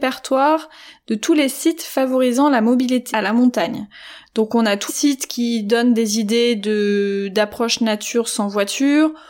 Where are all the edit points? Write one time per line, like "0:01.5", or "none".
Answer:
0:03.1
0:04.9